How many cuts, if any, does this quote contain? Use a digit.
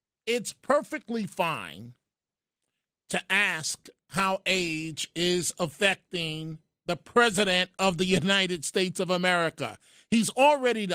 0